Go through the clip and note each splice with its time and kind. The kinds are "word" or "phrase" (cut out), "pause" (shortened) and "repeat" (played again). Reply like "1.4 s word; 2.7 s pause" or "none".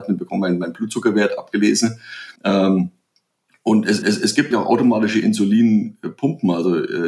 2.4 s pause; 4.0 s repeat; 4.5 s word